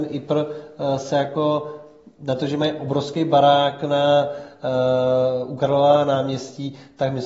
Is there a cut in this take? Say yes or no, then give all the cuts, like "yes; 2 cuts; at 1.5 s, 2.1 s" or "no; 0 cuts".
no; 0 cuts